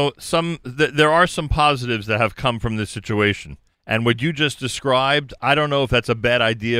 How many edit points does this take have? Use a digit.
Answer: 1